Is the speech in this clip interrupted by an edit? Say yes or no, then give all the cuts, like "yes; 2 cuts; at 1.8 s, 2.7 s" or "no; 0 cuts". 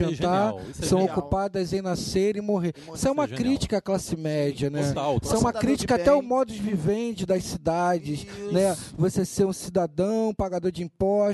no; 0 cuts